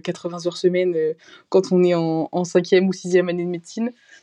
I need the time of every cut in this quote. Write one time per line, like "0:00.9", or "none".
none